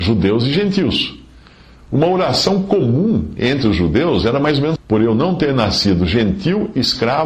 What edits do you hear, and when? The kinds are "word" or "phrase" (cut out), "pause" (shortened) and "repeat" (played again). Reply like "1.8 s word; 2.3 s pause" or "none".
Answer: 4.8 s phrase